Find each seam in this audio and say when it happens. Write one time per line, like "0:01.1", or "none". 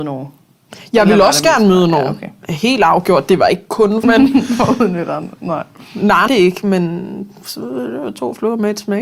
0:04.0
0:06.3